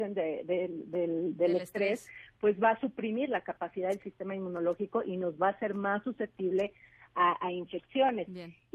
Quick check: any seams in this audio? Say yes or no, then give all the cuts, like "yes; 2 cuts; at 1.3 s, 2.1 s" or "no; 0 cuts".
no; 0 cuts